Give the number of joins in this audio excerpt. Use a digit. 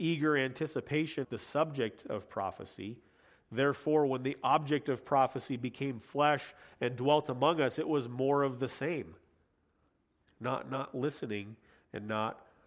1